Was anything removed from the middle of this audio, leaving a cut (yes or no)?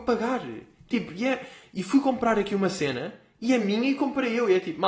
no